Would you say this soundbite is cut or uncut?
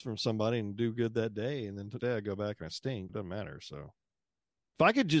cut